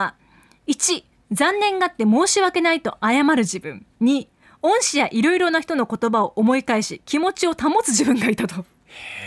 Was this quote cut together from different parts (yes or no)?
yes